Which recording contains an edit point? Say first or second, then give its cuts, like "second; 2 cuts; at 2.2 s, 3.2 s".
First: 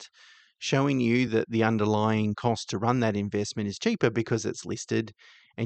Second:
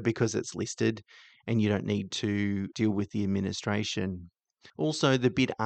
second; 1 cut; at 2.7 s